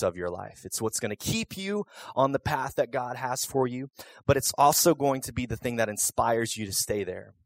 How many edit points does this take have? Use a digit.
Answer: 0